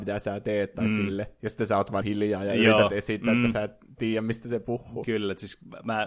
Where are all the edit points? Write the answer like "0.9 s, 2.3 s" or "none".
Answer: 2.0 s